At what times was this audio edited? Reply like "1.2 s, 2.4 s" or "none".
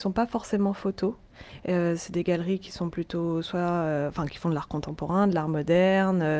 none